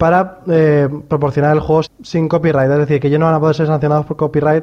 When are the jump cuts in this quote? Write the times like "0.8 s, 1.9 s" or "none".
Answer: 1.8 s